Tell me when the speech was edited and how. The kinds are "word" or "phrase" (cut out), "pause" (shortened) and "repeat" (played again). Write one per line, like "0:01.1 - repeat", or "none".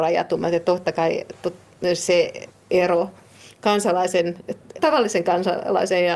0:02.5 - pause
0:04.8 - word